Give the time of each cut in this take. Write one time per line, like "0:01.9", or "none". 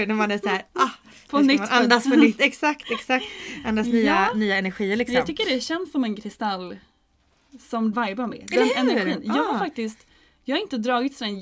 0:07.9